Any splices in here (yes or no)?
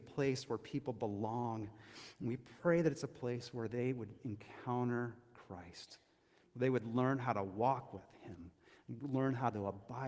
no